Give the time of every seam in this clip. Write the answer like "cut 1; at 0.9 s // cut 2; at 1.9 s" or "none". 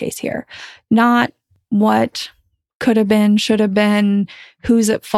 none